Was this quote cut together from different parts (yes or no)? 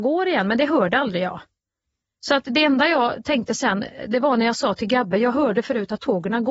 no